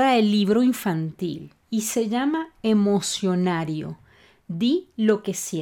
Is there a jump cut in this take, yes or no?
no